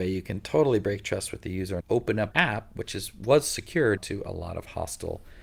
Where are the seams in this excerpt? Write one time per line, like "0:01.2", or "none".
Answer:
0:01.8
0:02.3
0:04.0